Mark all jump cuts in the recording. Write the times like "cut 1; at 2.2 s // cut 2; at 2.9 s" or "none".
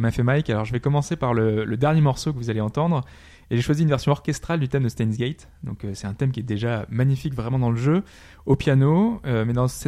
none